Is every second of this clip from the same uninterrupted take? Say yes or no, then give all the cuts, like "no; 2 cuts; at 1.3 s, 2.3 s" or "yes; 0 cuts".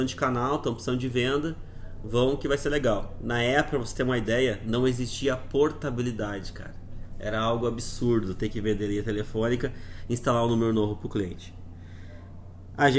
yes; 0 cuts